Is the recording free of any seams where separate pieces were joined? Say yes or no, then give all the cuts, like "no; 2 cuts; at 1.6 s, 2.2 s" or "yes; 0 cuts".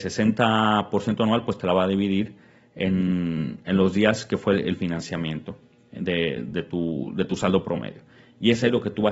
yes; 0 cuts